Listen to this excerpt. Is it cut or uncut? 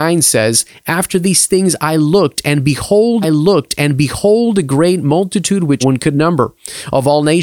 cut